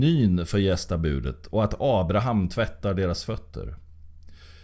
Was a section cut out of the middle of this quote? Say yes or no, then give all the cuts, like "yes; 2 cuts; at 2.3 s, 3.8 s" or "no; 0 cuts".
no; 0 cuts